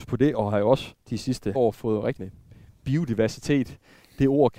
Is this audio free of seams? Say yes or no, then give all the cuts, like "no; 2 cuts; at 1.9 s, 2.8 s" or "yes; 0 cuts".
no; 3 cuts; at 1.0 s, 1.5 s, 2.2 s